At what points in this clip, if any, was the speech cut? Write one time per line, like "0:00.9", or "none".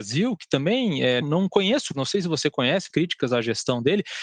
0:01.2
0:01.9
0:02.9